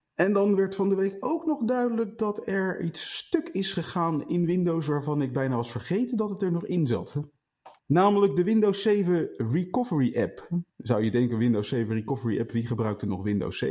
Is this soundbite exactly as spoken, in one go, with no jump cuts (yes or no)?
no